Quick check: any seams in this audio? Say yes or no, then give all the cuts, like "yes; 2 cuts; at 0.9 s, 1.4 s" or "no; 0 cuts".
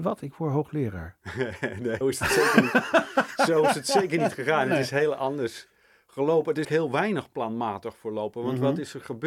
yes; 2 cuts; at 2.0 s, 6.6 s